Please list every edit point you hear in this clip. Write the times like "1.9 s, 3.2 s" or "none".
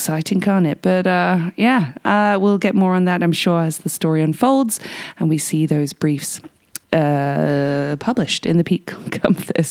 6.8 s